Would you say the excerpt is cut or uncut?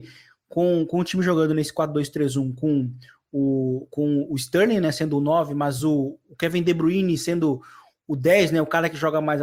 uncut